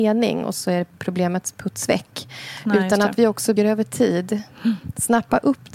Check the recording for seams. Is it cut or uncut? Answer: cut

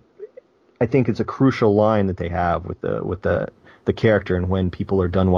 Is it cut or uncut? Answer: uncut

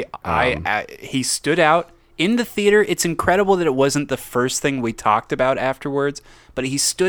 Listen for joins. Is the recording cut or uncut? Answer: uncut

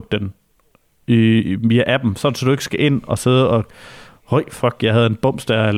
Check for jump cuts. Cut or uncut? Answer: uncut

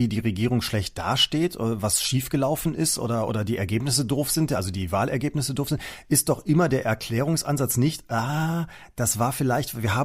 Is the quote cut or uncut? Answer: uncut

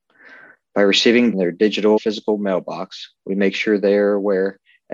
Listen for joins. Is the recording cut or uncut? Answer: cut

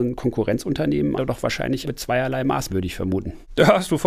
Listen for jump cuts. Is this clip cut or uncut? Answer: cut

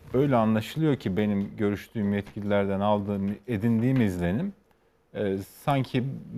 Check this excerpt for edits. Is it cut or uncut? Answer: uncut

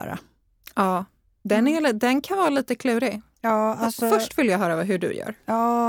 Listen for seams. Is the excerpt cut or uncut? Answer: uncut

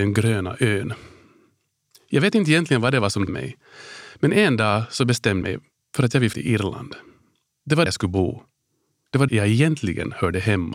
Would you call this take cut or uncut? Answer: cut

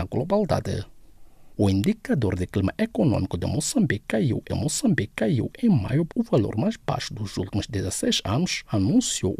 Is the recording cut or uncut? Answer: cut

